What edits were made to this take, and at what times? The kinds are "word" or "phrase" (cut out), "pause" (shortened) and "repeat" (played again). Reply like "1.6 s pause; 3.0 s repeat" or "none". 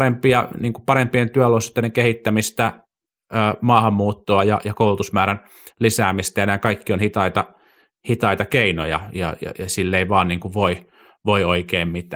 none

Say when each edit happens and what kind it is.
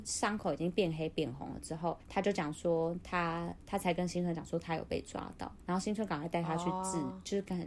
2.0 s pause; 5.6 s pause

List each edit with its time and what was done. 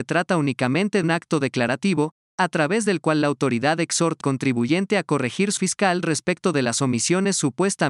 1.0 s word; 4.2 s word; 5.6 s word

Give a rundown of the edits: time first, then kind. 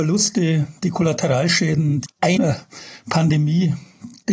2.1 s word; 2.4 s phrase

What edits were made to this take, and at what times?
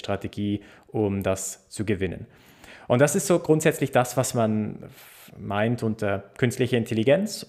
none

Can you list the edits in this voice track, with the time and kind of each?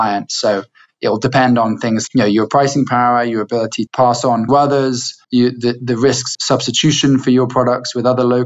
2.1 s word; 3.9 s word; 4.5 s phrase; 5.2 s pause; 6.3 s word

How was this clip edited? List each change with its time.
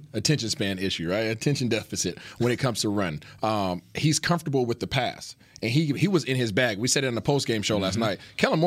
none

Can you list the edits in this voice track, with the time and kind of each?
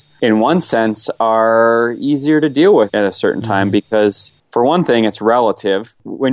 none

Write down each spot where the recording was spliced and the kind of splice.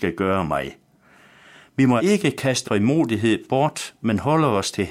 2.0 s word; 2.6 s word

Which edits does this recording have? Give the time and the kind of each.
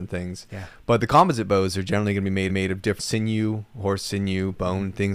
2.5 s repeat; 3.0 s word

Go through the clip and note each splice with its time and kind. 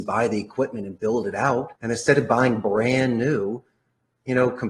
1.8 s pause

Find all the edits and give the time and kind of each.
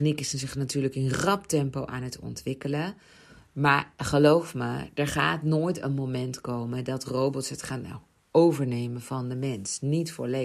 none

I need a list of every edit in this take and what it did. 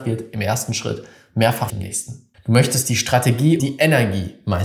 1.7 s word; 2.3 s pause; 3.6 s word

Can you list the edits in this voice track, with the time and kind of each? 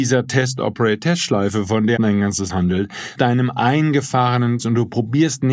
2.0 s word; 2.5 s word; 3.1 s phrase; 4.6 s word

